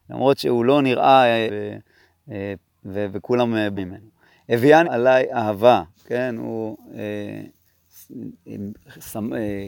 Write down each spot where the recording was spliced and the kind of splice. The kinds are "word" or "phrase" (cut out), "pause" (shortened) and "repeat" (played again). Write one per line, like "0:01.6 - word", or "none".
0:01.5 - phrase
0:02.7 - pause
0:03.8 - word
0:04.8 - phrase
0:05.9 - pause